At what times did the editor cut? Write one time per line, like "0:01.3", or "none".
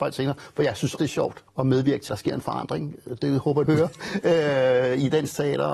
0:01.0
0:01.5
0:02.1
0:03.7